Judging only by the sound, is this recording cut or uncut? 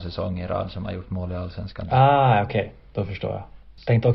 uncut